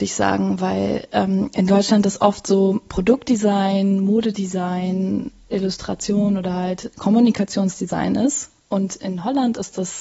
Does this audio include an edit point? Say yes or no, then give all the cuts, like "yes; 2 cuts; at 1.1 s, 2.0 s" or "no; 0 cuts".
no; 0 cuts